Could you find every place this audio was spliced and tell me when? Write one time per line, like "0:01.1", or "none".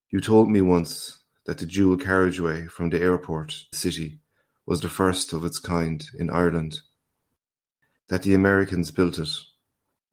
0:03.7